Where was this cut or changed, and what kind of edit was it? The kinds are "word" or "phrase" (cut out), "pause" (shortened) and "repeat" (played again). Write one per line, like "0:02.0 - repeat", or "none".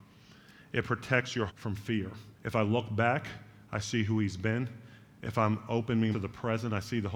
0:01.5 - word
0:02.4 - pause
0:06.1 - phrase